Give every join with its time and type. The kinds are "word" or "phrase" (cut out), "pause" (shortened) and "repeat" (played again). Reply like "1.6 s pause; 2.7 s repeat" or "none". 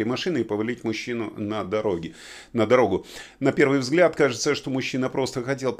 none